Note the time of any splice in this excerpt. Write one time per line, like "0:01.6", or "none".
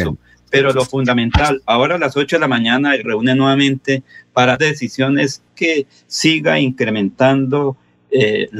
0:03.0
0:04.6
0:05.5